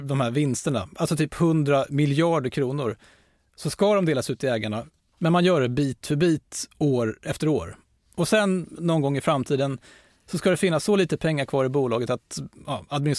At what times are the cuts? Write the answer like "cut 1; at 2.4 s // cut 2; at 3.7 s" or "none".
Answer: none